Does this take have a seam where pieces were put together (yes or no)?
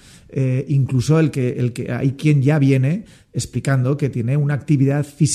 no